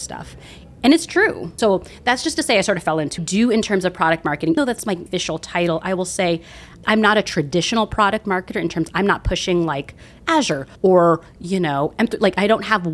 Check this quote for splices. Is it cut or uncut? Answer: cut